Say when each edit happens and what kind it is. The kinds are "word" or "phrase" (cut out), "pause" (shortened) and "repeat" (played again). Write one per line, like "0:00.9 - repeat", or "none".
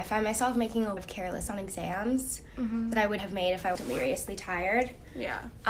0:01.0 - word
0:01.5 - word
0:03.2 - word
0:03.7 - word